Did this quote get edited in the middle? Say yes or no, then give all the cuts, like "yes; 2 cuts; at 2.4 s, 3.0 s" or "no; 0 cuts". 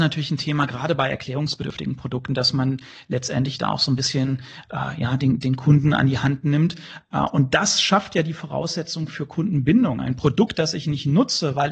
no; 0 cuts